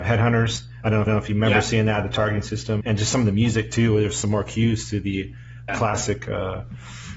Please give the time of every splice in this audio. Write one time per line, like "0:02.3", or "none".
0:01.1
0:02.8
0:05.7